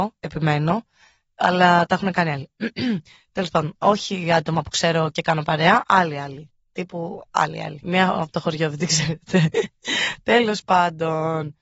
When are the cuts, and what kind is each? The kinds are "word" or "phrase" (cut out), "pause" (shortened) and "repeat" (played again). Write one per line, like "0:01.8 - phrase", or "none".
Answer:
none